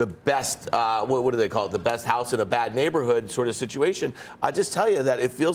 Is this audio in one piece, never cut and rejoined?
yes; 0 cuts

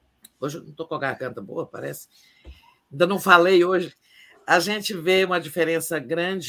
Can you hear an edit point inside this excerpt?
no; 0 cuts

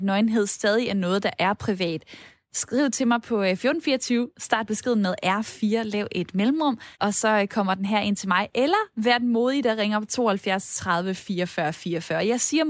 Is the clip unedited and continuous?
no; 1 cut; at 6.9 s

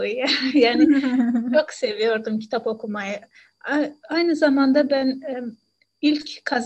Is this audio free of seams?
yes; 0 cuts

